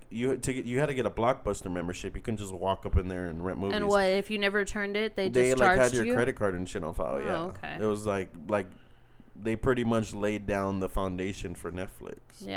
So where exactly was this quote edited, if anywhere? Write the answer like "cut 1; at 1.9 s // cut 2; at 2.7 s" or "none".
none